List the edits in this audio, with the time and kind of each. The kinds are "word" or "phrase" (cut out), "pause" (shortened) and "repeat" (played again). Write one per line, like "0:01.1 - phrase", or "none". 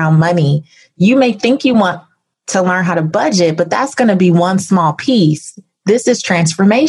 none